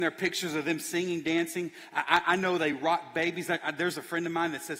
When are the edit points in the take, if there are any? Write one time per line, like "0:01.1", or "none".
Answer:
none